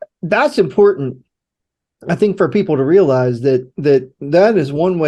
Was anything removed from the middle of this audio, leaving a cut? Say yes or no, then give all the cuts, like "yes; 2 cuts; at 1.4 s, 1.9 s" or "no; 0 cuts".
no; 0 cuts